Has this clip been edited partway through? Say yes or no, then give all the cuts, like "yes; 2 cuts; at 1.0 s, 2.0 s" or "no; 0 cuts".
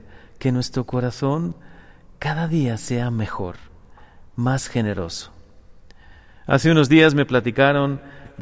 no; 0 cuts